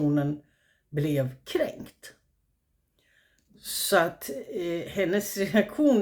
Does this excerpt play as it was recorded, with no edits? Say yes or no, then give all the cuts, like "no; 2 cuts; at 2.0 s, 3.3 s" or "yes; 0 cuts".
yes; 0 cuts